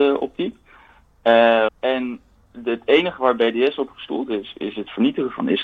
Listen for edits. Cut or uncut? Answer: cut